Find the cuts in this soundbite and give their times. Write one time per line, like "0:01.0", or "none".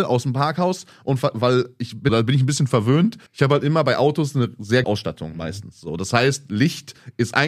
0:02.1
0:03.3
0:04.8